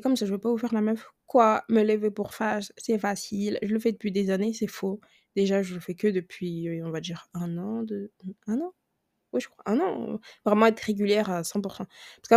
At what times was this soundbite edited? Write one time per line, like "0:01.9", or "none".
none